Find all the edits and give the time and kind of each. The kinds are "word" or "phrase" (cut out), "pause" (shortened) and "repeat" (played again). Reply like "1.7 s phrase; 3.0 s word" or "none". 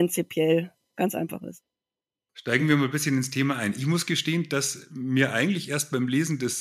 none